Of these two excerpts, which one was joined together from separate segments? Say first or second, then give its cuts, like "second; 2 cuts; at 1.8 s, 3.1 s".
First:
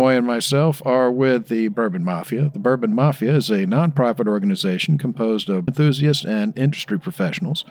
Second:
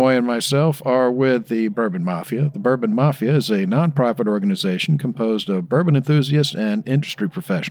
first; 1 cut; at 5.7 s